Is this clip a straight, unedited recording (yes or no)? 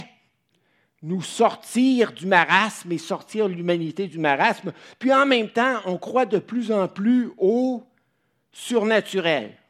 yes